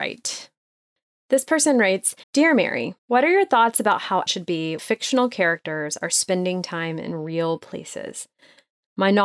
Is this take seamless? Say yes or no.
no